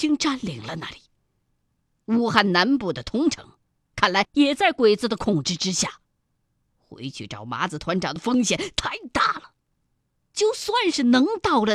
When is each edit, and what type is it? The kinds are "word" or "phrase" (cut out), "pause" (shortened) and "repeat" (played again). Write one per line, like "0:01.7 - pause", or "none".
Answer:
none